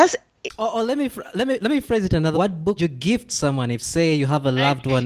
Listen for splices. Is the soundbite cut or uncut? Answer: cut